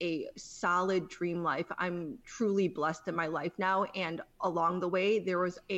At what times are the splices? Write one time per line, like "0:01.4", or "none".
none